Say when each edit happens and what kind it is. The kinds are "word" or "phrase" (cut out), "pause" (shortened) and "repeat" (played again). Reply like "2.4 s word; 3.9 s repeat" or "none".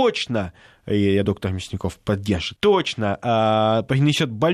1.2 s word; 2.6 s word